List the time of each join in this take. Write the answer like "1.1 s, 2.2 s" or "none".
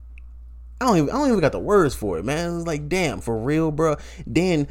none